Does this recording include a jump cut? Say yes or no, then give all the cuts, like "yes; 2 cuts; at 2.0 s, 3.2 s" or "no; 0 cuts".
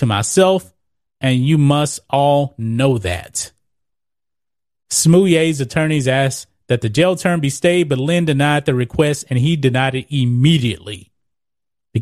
no; 0 cuts